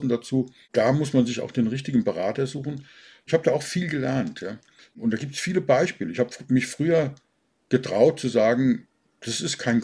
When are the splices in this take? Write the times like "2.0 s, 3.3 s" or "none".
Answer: none

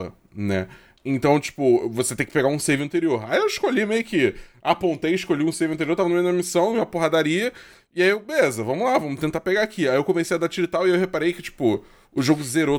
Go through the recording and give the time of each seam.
none

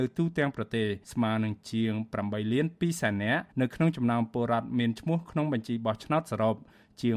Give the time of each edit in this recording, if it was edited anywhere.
1.0 s, 3.5 s

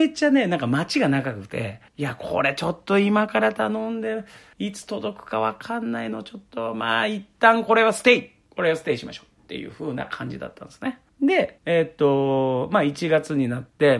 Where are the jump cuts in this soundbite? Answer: none

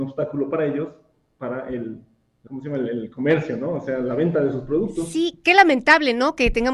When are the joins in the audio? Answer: 2.5 s

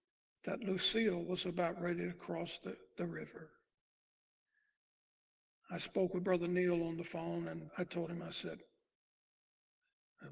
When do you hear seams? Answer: 7.7 s

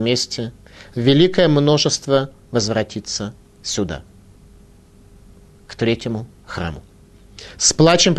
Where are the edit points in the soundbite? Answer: none

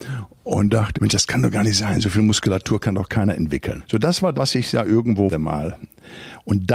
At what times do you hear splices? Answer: 0.9 s, 4.3 s, 5.3 s

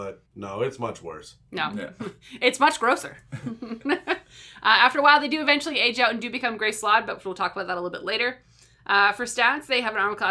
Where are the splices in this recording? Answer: none

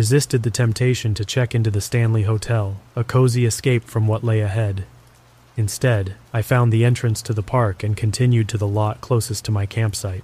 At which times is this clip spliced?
2.9 s, 6.3 s

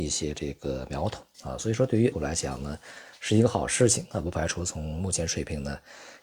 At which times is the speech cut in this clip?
2.1 s

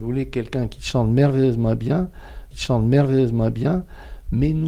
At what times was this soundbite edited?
2.5 s

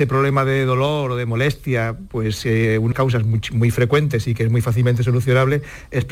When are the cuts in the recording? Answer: 2.9 s

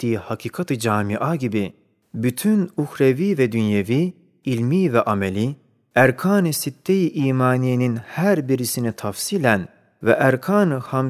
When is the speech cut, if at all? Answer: none

